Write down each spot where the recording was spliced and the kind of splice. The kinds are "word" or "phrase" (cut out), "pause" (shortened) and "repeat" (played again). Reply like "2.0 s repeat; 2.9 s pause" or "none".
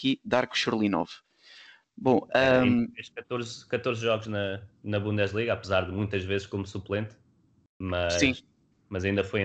none